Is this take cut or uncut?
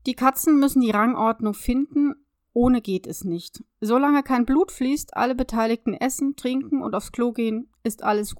uncut